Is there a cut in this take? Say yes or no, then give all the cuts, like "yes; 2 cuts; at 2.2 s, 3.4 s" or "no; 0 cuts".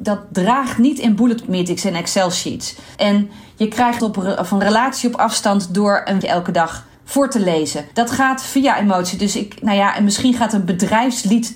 yes; 6 cuts; at 1.4 s, 2.9 s, 4.0 s, 6.2 s, 6.9 s, 7.9 s